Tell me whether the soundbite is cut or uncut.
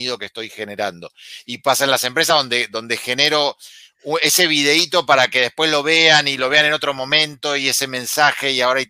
uncut